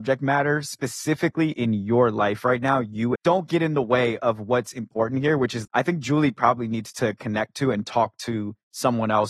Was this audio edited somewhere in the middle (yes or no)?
yes